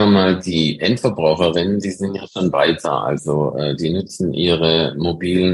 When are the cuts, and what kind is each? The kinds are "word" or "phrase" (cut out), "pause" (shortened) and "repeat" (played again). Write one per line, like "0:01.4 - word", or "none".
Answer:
none